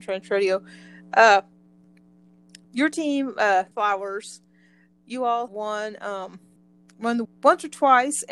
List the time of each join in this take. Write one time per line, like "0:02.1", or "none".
0:02.6
0:03.7
0:05.5
0:06.6
0:07.2